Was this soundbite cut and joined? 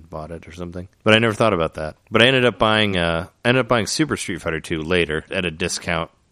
no; 0 cuts

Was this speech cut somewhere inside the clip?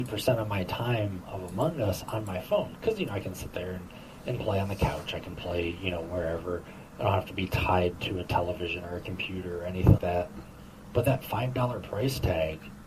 yes; 1 cut; at 10.0 s

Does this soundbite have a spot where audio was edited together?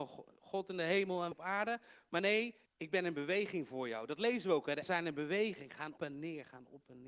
yes; 4 cuts; at 1.3 s, 2.7 s, 4.8 s, 6.0 s

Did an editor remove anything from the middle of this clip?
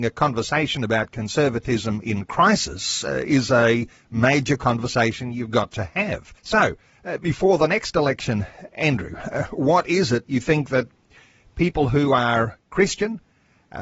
yes; 1 cut; at 6.4 s

